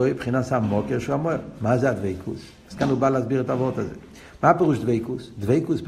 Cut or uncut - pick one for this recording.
uncut